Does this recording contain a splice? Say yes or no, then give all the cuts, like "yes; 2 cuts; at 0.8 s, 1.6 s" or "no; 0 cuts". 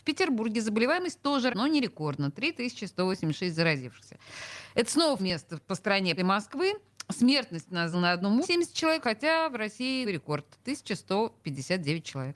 yes; 7 cuts; at 1.5 s, 5.2 s, 6.2 s, 7.9 s, 8.4 s, 9.0 s, 10.0 s